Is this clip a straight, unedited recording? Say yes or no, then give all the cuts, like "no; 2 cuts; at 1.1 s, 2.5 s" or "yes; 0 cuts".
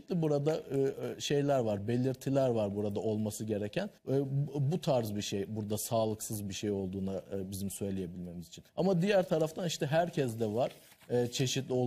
no; 2 cuts; at 4.0 s, 8.7 s